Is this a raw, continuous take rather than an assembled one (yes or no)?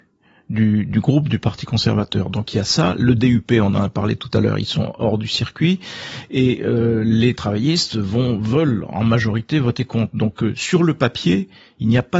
yes